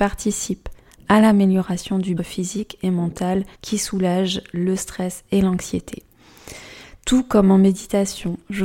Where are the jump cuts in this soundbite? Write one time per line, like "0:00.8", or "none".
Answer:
0:02.2
0:03.5